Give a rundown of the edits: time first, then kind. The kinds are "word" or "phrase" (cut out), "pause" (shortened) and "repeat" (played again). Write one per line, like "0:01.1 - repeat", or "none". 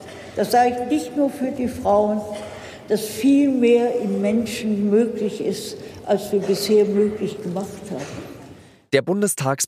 none